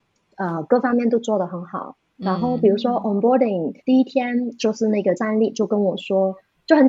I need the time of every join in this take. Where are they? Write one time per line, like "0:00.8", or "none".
0:03.8
0:05.2